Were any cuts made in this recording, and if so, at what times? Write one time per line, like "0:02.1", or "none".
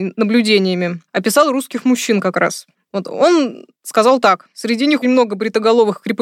0:05.0